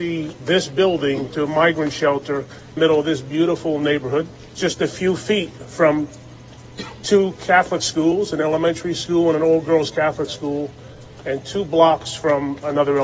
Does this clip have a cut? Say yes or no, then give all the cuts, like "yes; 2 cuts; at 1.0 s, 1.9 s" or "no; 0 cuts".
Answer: yes; 2 cuts; at 1.3 s, 2.8 s